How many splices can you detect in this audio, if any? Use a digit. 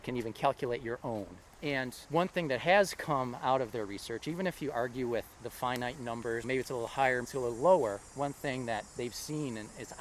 2